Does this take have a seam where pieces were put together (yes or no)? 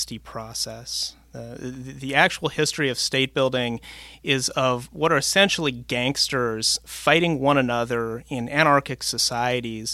no